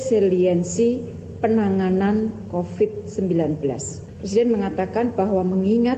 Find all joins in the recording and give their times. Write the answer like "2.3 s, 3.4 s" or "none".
2.5 s